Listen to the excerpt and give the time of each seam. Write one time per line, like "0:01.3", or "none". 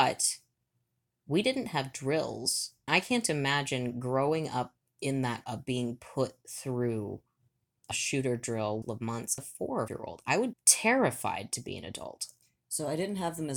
0:02.9
0:05.4
0:07.9
0:08.8
0:09.4
0:09.9
0:10.5